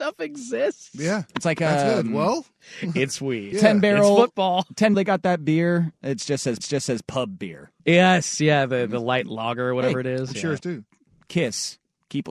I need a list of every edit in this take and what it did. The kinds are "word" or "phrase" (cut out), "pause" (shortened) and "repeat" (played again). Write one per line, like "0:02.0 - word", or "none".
0:01.3 - pause
0:03.5 - word
0:04.9 - word
0:06.6 - repeat
0:07.8 - pause
0:10.6 - word